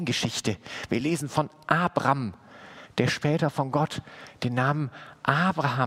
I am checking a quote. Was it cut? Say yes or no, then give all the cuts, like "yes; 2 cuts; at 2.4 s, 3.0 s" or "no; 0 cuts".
no; 0 cuts